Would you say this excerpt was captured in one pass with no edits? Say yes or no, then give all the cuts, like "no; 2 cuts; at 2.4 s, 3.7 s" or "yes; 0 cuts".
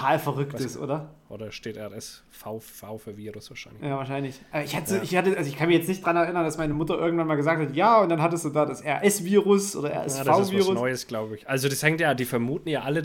yes; 0 cuts